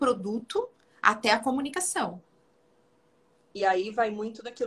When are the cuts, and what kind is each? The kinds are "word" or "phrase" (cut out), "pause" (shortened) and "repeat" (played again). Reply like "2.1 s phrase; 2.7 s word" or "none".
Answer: none